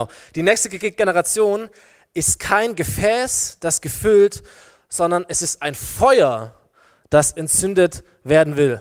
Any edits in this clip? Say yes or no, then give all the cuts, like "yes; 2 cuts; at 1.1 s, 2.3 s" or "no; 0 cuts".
no; 0 cuts